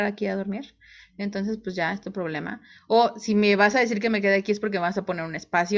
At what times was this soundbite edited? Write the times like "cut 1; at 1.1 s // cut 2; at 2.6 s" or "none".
none